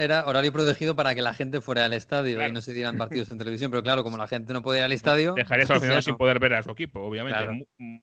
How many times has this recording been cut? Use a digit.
0